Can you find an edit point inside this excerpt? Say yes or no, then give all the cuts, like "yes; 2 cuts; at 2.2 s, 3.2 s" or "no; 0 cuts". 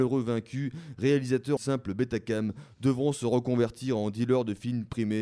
yes; 1 cut; at 1.6 s